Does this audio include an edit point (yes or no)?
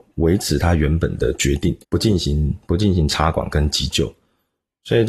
yes